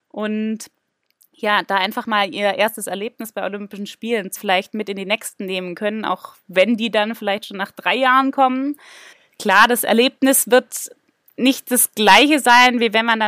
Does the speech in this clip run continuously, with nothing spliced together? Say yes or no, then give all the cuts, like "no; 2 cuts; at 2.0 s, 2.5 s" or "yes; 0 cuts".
no; 1 cut; at 4.4 s